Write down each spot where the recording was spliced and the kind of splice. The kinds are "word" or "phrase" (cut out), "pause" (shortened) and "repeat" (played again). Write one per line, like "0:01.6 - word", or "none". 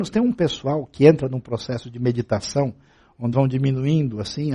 0:03.3 - word